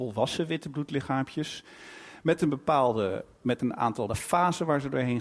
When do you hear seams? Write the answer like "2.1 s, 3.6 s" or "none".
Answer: 4.1 s